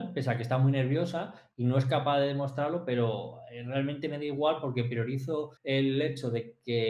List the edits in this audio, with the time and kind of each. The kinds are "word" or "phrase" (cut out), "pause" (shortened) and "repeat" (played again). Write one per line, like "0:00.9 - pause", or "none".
0:05.6 - pause